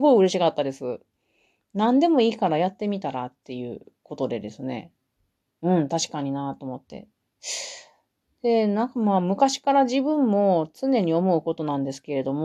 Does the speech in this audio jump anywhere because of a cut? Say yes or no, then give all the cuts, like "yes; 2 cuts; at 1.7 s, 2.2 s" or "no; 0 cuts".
no; 0 cuts